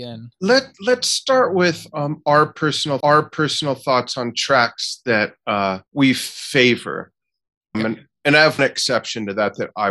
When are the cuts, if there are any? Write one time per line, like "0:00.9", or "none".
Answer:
0:03.0
0:05.9
0:07.7
0:08.6